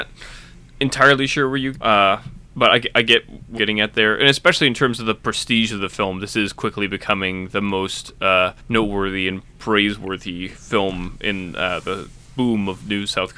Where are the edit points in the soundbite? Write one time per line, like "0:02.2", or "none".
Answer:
0:01.7
0:03.6
0:08.6
0:09.5